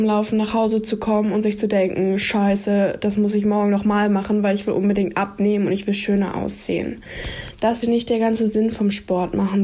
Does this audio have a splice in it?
yes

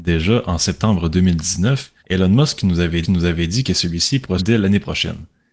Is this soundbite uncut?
no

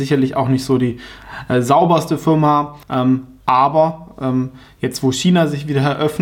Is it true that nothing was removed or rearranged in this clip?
no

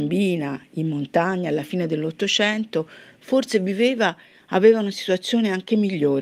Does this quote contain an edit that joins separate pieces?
no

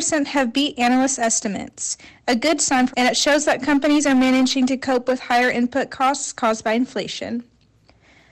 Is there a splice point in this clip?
yes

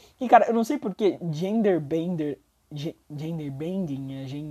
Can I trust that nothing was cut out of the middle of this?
yes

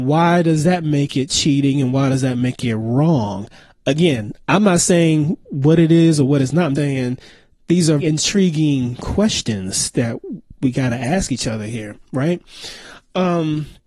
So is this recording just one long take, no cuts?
no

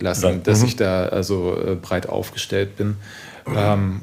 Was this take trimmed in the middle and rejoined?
no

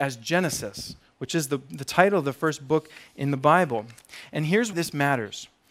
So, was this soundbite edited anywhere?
yes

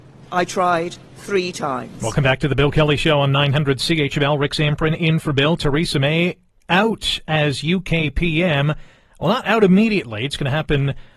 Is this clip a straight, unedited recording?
yes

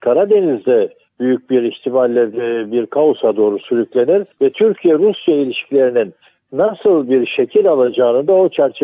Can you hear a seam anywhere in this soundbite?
yes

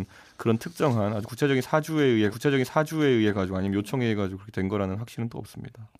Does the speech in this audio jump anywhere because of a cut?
yes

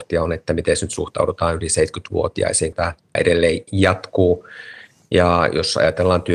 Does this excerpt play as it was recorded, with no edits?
no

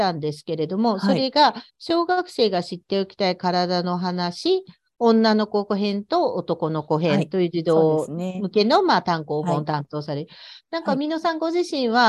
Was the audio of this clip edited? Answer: yes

